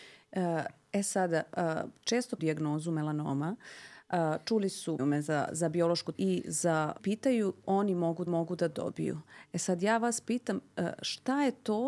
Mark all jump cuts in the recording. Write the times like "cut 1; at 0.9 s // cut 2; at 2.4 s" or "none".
cut 1; at 2.4 s // cut 2; at 5.0 s // cut 3; at 6.1 s // cut 4; at 7.0 s // cut 5; at 7.6 s // cut 6; at 8.3 s